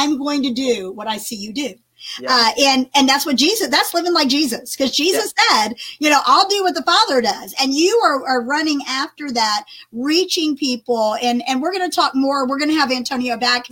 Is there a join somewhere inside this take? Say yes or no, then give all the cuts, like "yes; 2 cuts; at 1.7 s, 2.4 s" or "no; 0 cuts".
no; 0 cuts